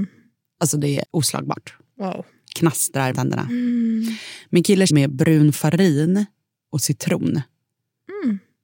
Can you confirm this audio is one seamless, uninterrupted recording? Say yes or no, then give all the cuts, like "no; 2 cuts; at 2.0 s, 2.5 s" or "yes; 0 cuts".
no; 3 cuts; at 1.0 s, 3.1 s, 4.9 s